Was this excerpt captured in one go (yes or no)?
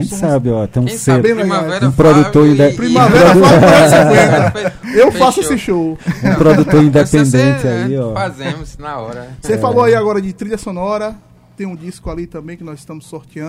yes